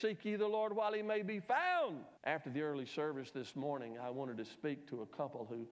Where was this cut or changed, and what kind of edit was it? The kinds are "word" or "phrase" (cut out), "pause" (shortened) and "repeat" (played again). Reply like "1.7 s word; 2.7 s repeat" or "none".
2.2 s pause